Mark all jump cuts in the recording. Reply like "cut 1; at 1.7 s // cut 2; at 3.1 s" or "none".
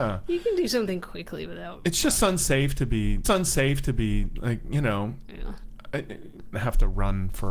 cut 1; at 3.2 s // cut 2; at 6.5 s

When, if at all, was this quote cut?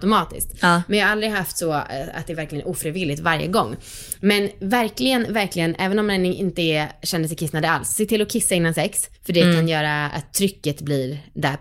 cut 1; at 9.2 s

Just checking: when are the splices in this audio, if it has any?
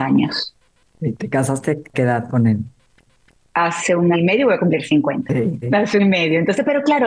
cut 1; at 1.9 s // cut 2; at 4.1 s // cut 3; at 5.6 s // cut 4; at 6.0 s

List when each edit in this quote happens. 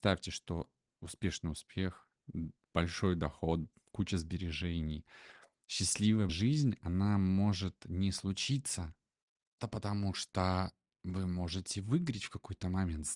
cut 1; at 6.3 s // cut 2; at 9.6 s

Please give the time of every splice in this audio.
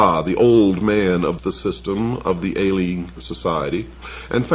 cut 1; at 1.4 s // cut 2; at 3.2 s

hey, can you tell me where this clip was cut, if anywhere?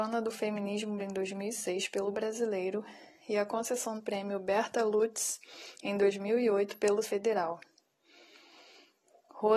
cut 1; at 1.0 s // cut 2; at 2.1 s // cut 3; at 4.0 s // cut 4; at 7.0 s

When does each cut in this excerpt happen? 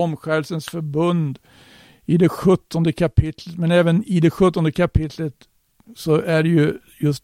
none

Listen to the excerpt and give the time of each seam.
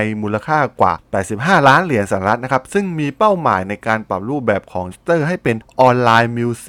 cut 1; at 4.9 s

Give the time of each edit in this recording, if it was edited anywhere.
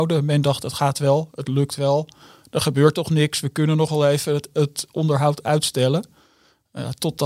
none

